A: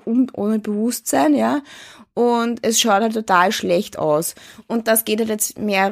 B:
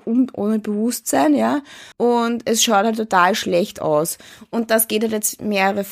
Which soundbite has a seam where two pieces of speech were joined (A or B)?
B